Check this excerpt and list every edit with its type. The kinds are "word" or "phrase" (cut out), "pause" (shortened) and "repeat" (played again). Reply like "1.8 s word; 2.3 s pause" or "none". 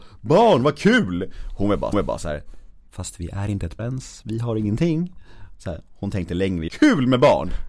1.9 s repeat; 2.9 s pause; 3.8 s word; 4.2 s word; 6.7 s phrase